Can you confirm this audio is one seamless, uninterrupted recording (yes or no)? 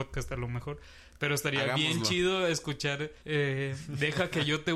no